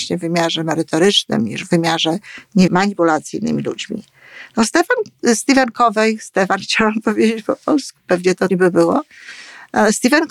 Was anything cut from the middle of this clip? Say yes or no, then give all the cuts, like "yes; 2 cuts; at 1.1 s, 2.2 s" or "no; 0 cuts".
yes; 2 cuts; at 2.7 s, 8.5 s